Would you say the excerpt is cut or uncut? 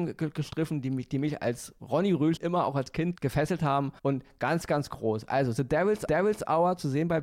cut